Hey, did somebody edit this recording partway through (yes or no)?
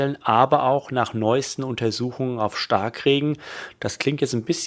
no